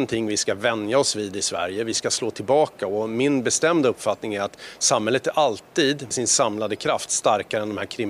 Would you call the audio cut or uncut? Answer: cut